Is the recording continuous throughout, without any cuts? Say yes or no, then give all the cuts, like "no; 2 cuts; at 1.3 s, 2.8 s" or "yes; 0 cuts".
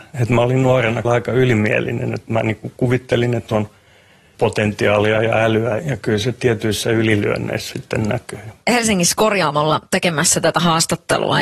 no; 6 cuts; at 1.0 s, 3.5 s, 4.3 s, 5.8 s, 7.7 s, 8.6 s